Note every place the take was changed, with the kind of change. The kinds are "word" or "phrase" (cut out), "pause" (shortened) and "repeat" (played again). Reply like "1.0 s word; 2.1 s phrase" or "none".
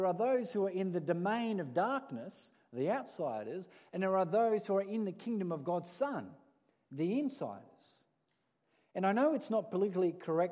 none